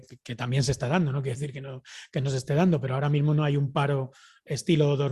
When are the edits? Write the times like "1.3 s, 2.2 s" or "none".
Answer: none